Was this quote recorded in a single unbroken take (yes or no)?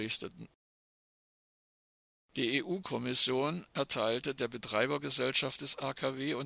yes